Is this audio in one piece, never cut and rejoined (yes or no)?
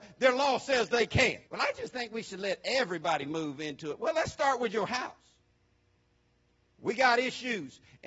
no